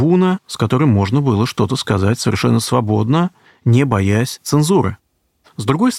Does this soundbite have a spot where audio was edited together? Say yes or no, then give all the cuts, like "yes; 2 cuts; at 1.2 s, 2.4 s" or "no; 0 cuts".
no; 0 cuts